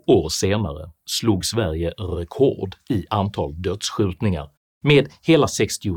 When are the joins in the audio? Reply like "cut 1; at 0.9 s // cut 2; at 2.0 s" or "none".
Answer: none